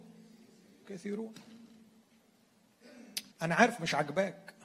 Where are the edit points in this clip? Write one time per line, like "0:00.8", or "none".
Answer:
0:03.3

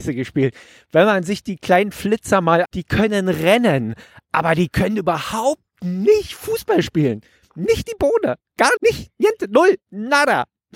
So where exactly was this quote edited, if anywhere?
0:02.6
0:08.8

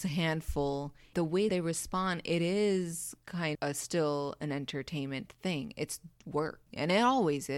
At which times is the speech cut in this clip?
0:01.1
0:01.5
0:03.5
0:06.7

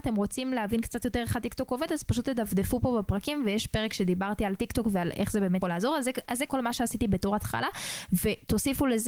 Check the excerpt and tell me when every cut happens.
0:05.6
0:06.5

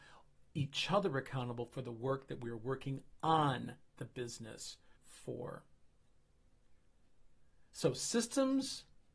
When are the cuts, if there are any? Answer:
0:05.0

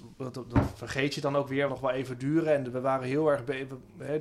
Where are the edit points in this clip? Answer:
0:01.7

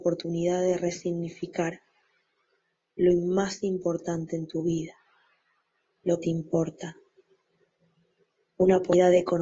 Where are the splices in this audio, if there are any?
0:06.2

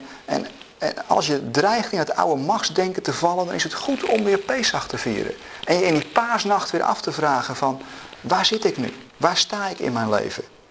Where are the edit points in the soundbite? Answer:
0:09.1

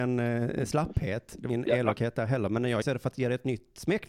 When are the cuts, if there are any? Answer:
0:01.5
0:02.8

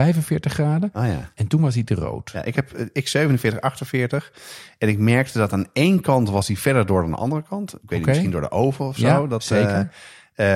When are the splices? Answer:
none

